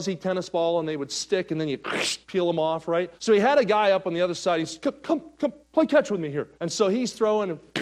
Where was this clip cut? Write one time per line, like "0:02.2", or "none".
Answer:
0:03.2
0:06.5